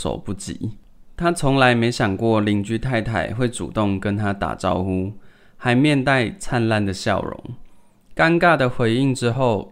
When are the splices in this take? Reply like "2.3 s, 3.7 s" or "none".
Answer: none